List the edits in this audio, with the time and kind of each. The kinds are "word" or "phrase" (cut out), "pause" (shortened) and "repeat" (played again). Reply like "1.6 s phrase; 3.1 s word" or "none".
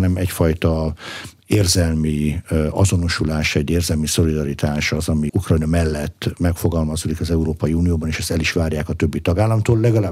5.3 s word